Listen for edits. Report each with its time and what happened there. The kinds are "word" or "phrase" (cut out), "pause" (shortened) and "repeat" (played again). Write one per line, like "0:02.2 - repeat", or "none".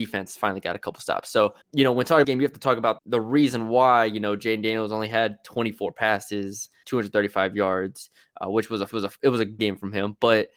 0:01.6 - pause
0:02.2 - phrase
0:03.0 - word
0:06.8 - word
0:08.9 - repeat
0:09.6 - word

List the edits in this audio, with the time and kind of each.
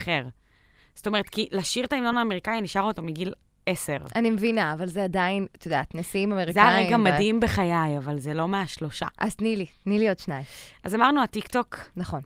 none

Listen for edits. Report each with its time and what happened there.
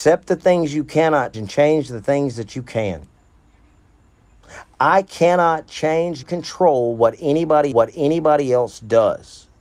0:01.3 - word
0:06.2 - word
0:07.7 - repeat

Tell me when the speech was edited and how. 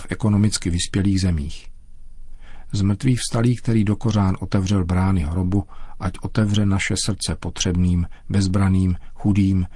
none

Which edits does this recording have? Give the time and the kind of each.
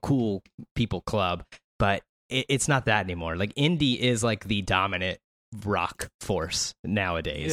none

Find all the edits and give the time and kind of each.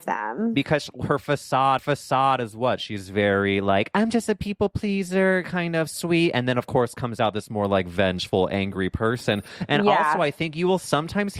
0:01.8 - repeat

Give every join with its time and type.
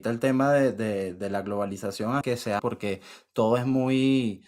0:02.2 - word
0:02.6 - phrase

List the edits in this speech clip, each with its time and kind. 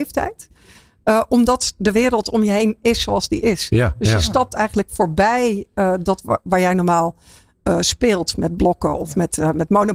none

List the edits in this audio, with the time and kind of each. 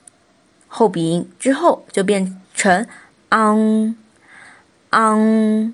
0:02.4 - pause

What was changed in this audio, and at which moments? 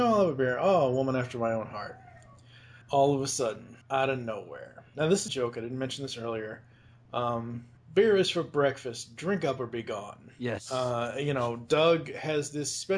0:02.8 - pause
0:03.8 - pause
0:05.3 - phrase
0:07.8 - pause

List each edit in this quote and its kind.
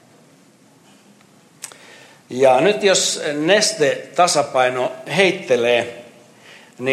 none

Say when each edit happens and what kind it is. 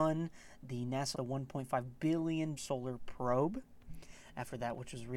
0:01.1 - word
0:02.6 - word

